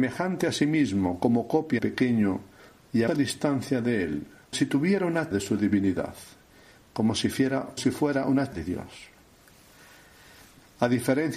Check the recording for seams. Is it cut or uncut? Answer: cut